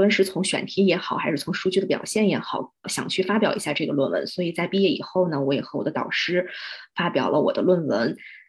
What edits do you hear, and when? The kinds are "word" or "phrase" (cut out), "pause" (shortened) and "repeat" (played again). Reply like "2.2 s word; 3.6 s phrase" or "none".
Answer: 2.8 s phrase